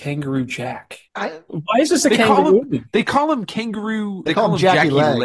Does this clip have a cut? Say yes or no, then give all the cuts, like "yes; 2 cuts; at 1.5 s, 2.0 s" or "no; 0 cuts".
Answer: yes; 2 cuts; at 1.1 s, 4.3 s